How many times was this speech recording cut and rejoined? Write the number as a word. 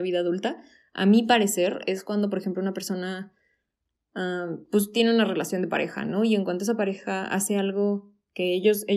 zero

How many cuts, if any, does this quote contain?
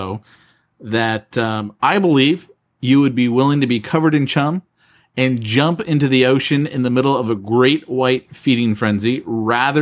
zero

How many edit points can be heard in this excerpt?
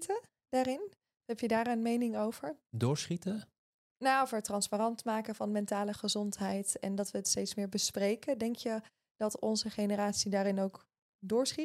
zero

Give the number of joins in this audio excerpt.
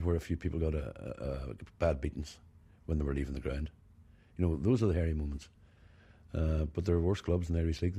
zero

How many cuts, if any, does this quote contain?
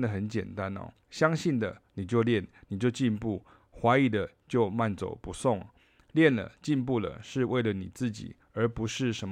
one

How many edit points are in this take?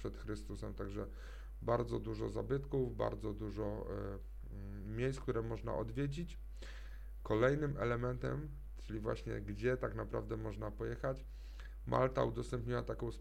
zero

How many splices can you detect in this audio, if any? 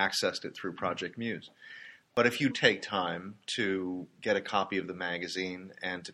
one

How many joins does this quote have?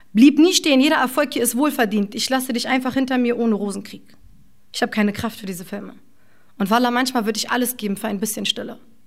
zero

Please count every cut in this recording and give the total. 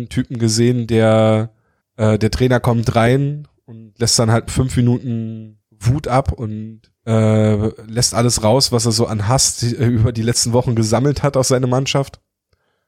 three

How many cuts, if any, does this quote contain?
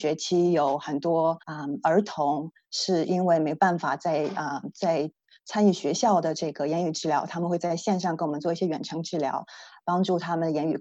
one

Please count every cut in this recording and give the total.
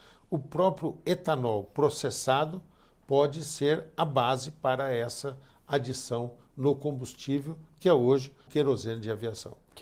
one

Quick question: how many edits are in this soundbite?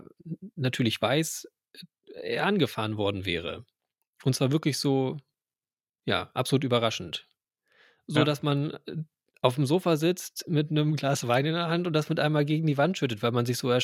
zero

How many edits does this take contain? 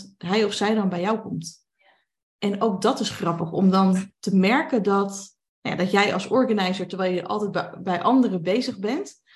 zero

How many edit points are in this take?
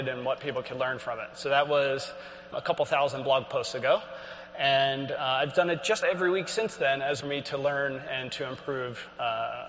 three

